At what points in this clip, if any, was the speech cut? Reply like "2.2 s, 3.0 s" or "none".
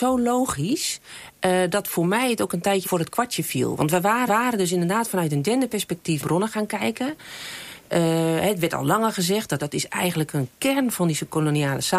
2.8 s, 4.3 s, 6.2 s, 9.6 s